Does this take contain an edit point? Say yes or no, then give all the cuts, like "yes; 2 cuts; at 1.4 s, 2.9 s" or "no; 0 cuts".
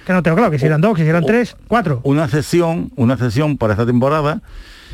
no; 0 cuts